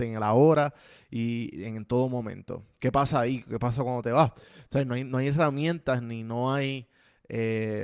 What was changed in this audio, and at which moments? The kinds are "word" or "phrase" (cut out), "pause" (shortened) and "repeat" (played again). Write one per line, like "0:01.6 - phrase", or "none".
none